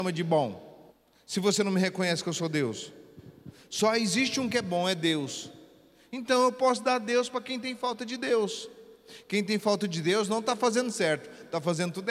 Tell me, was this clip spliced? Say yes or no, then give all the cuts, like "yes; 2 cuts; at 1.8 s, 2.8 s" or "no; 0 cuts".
yes; 1 cut; at 0.9 s